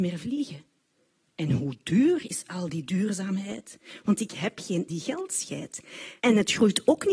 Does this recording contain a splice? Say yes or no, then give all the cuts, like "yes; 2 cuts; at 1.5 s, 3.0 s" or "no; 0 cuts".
yes; 2 cuts; at 4.9 s, 6.2 s